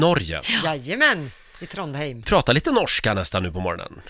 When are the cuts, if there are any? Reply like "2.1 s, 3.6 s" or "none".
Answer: 2.2 s